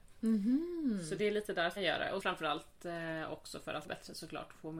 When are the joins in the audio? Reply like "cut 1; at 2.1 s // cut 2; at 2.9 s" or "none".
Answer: cut 1; at 1.8 s // cut 2; at 2.2 s // cut 3; at 3.8 s